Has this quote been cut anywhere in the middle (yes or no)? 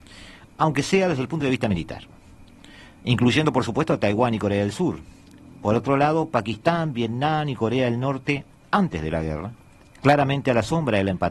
no